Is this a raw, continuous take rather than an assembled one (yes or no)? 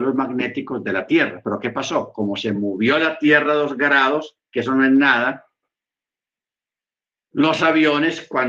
yes